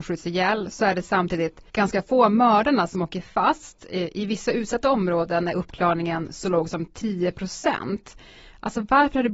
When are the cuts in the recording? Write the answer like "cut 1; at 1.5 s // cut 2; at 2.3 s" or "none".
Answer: cut 1; at 1.7 s